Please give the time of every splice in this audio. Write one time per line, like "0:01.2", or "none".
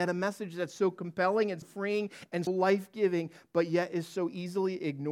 0:01.6
0:02.5